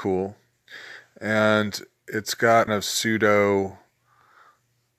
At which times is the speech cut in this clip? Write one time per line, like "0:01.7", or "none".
0:02.7